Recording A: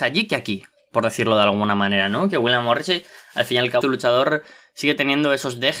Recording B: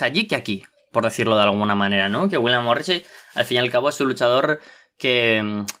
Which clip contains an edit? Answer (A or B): A